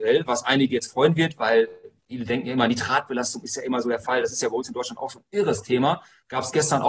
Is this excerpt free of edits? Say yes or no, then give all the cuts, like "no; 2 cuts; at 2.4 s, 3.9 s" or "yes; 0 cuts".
no; 1 cut; at 2.0 s